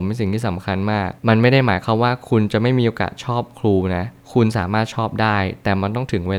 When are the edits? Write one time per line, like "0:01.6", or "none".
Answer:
0:01.2